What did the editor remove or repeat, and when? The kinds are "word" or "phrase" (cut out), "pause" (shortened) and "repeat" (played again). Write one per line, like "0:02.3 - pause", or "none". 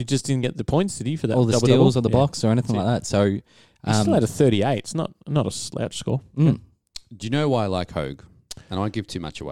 none